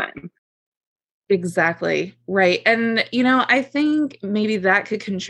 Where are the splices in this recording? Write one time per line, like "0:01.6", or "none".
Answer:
none